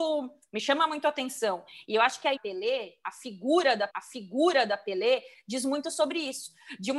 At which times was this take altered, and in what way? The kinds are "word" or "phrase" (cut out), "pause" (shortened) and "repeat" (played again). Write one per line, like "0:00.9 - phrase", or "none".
0:02.4 - phrase
0:03.9 - repeat